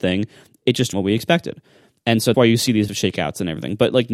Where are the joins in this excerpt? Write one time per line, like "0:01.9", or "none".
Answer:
0:00.9
0:02.3
0:02.9